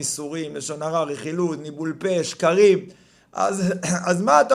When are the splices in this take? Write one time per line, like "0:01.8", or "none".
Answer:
none